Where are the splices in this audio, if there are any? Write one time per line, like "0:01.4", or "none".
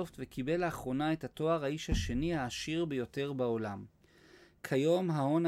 none